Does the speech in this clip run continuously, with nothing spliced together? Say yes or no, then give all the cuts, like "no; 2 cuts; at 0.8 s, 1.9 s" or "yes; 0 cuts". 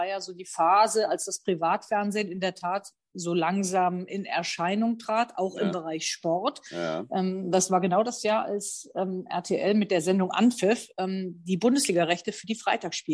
yes; 0 cuts